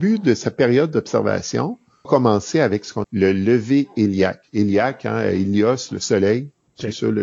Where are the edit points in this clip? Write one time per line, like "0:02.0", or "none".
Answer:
0:02.0
0:03.0